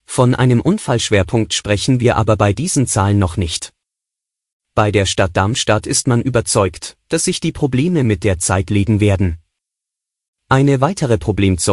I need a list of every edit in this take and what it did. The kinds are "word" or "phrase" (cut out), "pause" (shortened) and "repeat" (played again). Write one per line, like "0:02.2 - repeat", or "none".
none